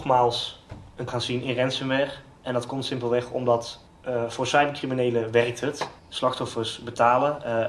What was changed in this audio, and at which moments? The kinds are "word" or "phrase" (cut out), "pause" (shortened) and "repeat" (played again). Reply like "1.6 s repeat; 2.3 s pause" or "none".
1.1 s word; 3.9 s pause; 6.0 s pause